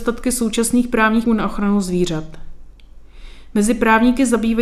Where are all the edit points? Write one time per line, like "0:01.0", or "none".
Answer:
0:01.3

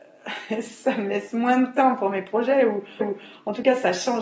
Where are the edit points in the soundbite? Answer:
0:03.0

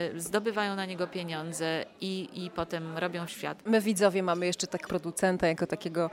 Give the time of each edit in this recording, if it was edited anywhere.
0:03.3
0:04.9

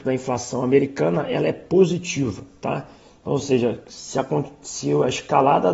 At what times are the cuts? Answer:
none

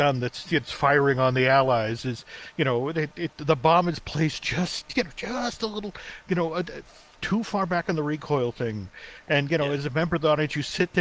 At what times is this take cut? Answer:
none

